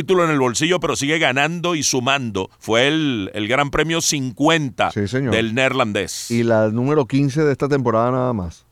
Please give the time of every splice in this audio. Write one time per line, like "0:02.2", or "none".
0:02.5